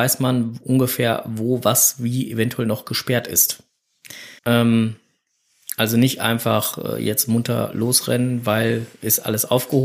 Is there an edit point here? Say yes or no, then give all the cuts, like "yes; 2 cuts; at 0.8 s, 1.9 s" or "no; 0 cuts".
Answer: yes; 1 cut; at 4.4 s